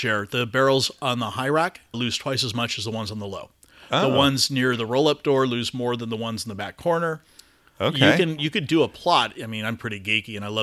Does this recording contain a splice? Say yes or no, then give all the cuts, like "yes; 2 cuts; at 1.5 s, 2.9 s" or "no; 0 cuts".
yes; 1 cut; at 1.9 s